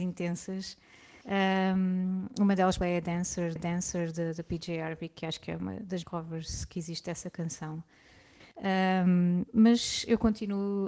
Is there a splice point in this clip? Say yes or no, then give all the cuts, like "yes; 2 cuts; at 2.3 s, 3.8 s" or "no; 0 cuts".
yes; 5 cuts; at 1.2 s, 2.8 s, 3.6 s, 6.0 s, 8.5 s